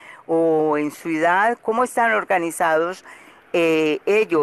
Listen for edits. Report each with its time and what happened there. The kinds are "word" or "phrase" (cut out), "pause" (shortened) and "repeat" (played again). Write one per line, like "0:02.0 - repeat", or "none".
0:01.6 - word